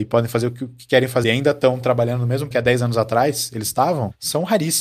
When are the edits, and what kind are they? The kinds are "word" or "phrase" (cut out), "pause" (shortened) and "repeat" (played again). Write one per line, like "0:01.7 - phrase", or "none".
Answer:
0:01.2 - phrase
0:02.5 - word